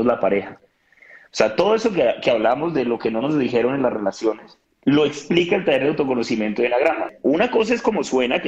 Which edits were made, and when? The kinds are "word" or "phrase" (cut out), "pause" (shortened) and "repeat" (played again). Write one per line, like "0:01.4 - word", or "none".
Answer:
0:04.6 - pause